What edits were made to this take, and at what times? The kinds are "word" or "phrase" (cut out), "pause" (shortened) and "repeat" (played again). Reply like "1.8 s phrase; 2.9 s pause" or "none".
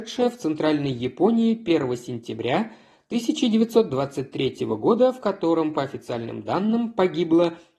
none